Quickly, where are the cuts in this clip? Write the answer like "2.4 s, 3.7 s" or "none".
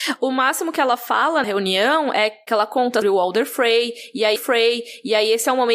1.4 s, 3.0 s, 4.4 s